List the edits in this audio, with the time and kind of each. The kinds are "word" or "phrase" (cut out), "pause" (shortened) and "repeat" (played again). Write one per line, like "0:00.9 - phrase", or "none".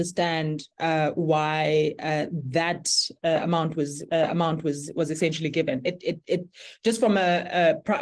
0:04.1 - repeat